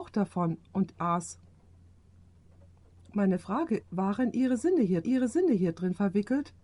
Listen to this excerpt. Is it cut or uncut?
cut